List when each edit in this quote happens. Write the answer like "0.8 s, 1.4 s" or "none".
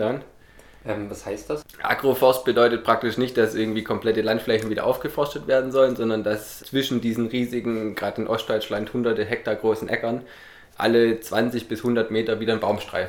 none